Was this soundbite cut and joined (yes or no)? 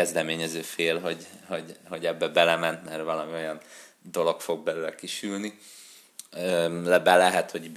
no